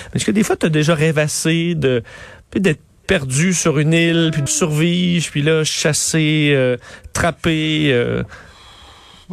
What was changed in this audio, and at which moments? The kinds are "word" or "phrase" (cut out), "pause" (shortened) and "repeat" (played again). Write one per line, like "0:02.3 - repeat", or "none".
0:04.5 - word